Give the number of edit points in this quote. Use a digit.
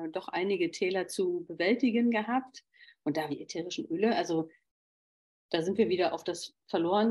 1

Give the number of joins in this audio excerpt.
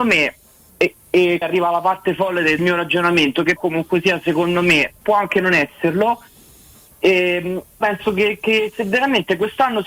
5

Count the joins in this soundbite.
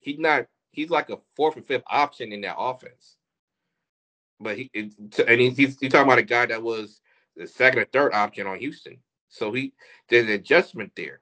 0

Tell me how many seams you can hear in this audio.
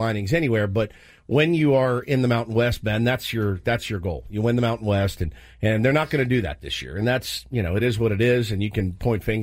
0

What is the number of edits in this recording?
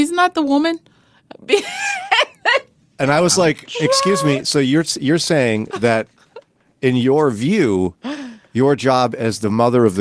0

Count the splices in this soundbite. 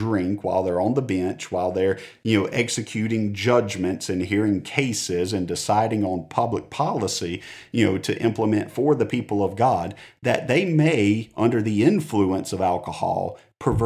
0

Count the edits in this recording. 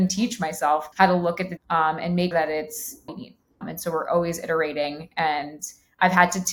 5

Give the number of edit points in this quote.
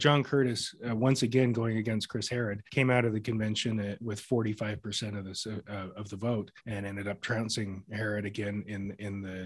2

